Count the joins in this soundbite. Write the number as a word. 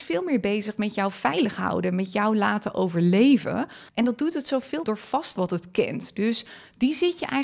three